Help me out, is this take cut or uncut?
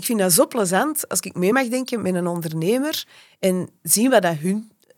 uncut